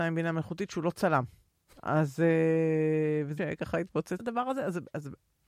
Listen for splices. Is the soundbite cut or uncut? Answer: cut